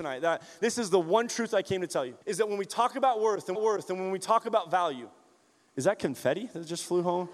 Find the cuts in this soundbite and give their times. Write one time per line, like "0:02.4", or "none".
0:02.2
0:03.5